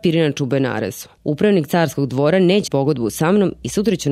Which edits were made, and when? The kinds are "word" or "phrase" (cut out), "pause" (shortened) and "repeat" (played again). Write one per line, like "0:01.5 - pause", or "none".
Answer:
0:01.2 - pause
0:02.7 - word

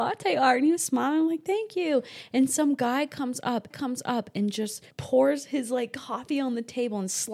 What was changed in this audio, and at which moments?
0:03.7 - repeat
0:04.9 - pause

